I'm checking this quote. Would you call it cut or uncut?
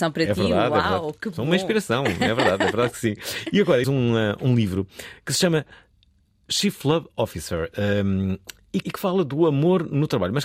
cut